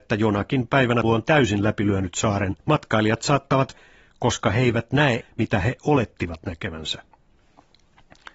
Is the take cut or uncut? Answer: cut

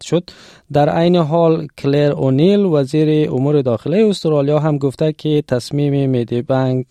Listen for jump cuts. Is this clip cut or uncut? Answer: uncut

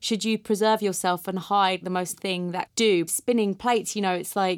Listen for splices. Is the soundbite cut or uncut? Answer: cut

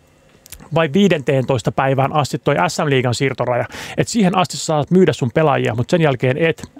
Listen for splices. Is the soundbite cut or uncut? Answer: uncut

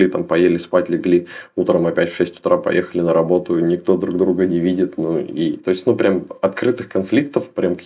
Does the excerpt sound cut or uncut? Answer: uncut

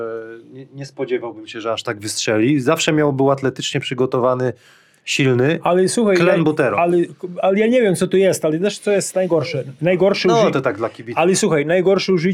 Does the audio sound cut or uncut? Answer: uncut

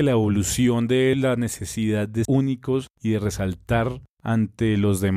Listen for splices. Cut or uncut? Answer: cut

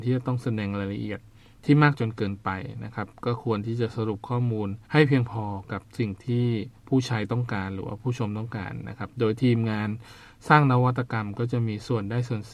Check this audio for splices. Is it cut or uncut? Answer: cut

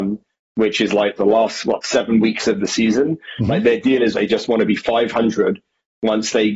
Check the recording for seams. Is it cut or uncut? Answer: cut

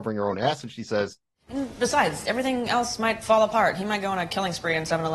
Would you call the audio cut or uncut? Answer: uncut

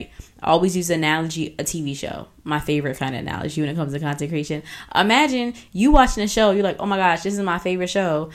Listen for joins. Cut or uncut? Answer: uncut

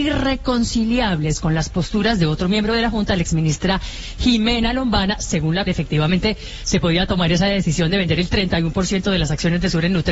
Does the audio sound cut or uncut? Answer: cut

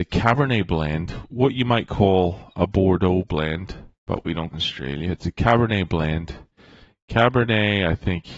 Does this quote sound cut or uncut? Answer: cut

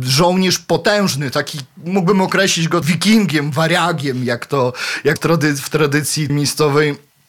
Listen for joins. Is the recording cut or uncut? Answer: cut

